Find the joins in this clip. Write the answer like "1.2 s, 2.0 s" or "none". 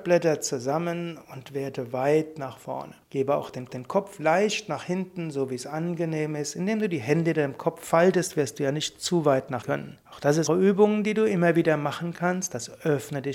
3.0 s, 3.7 s, 9.6 s, 10.0 s, 10.5 s